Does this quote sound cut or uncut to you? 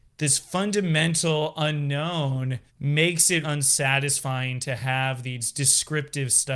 cut